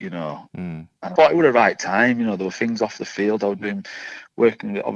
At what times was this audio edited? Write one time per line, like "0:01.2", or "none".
0:01.2